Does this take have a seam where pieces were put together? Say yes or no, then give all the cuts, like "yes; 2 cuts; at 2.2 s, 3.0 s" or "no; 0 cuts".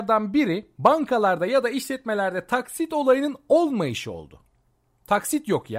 no; 0 cuts